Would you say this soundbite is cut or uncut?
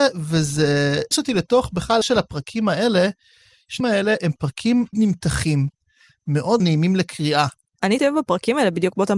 cut